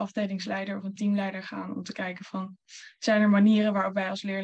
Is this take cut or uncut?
uncut